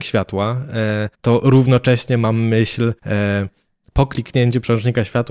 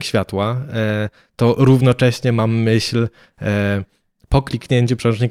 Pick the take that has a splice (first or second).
first